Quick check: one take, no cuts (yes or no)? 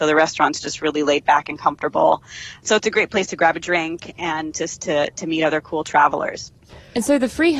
yes